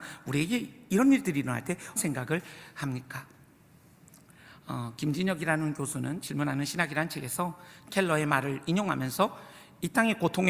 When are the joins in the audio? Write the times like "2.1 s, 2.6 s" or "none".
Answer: 2.0 s, 7.9 s